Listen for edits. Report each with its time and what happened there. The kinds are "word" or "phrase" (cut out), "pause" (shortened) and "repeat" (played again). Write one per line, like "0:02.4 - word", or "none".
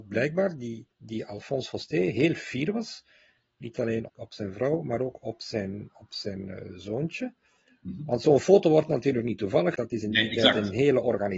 0:00.9 - pause
0:04.1 - phrase
0:09.7 - word